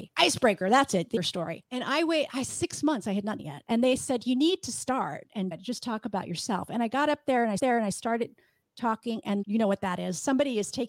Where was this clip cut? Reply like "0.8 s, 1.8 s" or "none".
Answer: 1.2 s, 3.4 s, 5.5 s, 7.6 s, 9.4 s